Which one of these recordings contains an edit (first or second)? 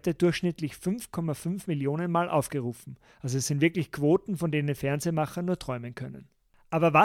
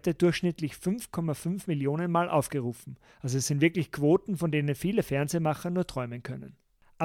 first